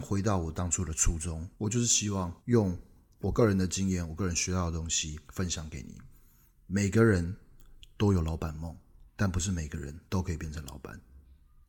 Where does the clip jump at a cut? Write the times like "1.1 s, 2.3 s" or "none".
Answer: 1.5 s, 2.4 s, 5.2 s, 9.1 s, 10.1 s